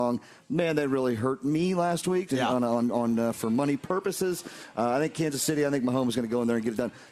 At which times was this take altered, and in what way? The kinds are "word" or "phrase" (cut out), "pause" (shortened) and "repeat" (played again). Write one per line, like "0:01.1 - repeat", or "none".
0:02.3 - word